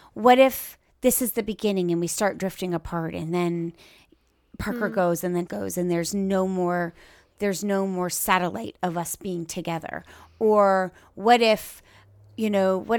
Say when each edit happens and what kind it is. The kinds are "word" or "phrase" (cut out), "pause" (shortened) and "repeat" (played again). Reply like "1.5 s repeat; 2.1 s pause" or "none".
5.5 s word